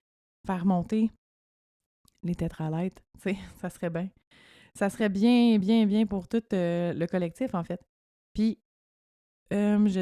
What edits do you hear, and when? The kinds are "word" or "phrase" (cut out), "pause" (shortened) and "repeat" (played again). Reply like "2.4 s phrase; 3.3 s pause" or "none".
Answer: none